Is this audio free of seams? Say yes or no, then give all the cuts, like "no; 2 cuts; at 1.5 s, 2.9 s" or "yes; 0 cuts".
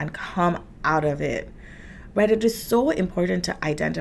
yes; 0 cuts